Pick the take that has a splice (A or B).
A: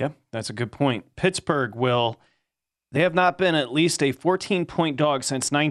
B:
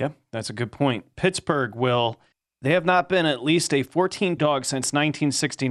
B